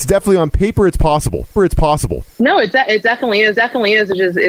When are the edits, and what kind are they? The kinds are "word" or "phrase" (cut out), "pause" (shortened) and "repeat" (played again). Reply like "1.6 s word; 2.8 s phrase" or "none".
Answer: 1.6 s repeat; 3.5 s repeat